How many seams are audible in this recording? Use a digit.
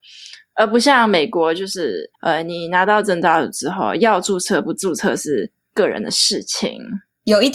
1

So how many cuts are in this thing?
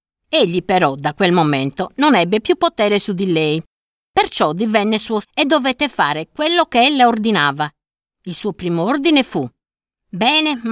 1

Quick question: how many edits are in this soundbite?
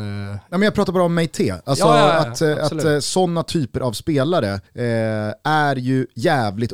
1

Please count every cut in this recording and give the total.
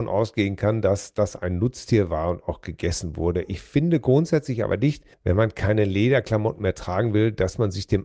1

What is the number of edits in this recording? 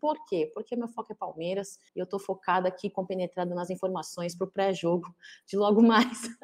1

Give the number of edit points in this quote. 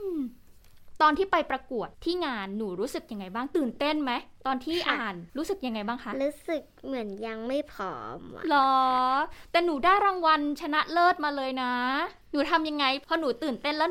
4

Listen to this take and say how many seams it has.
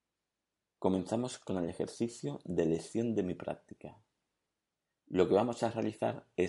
0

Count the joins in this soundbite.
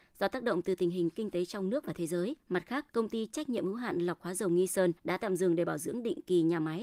3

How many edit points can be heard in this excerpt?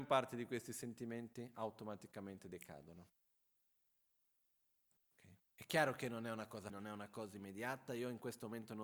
2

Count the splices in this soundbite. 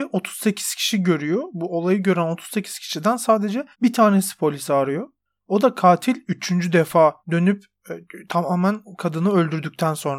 2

